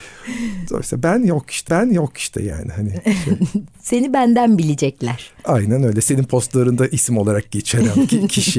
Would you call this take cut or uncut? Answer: cut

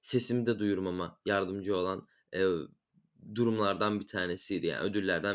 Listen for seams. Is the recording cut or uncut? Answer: uncut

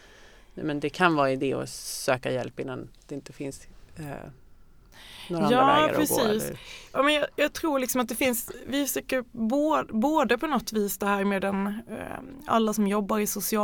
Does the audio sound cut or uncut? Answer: uncut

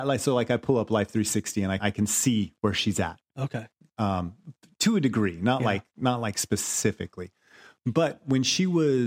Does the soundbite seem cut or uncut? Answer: cut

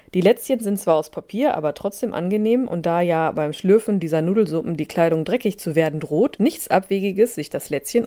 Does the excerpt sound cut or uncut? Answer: cut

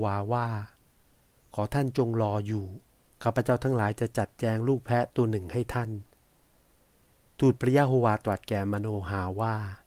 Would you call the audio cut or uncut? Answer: cut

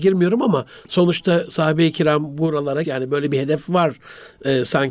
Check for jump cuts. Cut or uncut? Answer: cut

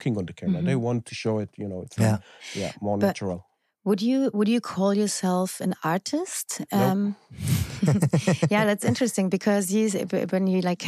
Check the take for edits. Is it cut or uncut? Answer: uncut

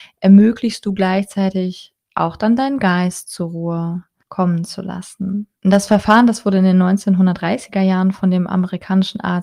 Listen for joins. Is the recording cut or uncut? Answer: cut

